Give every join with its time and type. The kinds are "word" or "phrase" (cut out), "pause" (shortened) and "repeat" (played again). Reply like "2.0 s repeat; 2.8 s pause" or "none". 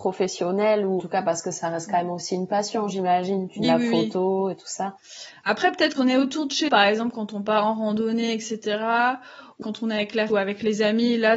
1.0 s word; 3.6 s word; 6.0 s word; 6.7 s word; 9.6 s word; 10.3 s word